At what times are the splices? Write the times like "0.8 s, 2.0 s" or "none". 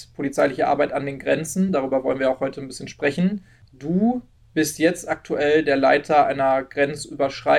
none